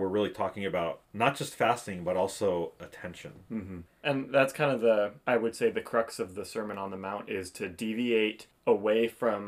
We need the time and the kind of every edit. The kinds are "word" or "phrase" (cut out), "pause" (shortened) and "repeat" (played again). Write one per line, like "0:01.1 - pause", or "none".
0:01.0 - pause
0:05.2 - pause